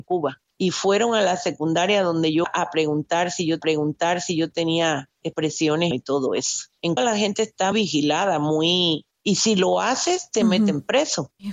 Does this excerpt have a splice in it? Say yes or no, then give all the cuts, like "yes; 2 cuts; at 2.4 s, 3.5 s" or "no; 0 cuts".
yes; 5 cuts; at 2.4 s, 3.6 s, 5.9 s, 7.0 s, 7.7 s